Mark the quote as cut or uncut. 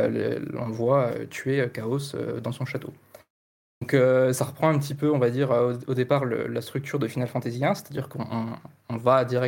uncut